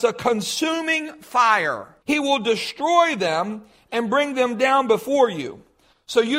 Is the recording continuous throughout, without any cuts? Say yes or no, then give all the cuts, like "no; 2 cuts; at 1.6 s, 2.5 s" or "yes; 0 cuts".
no; 1 cut; at 2.0 s